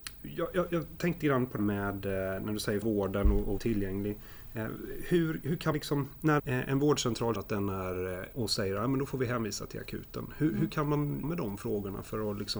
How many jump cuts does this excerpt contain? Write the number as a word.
nine